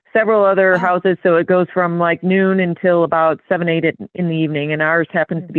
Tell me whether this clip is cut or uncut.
uncut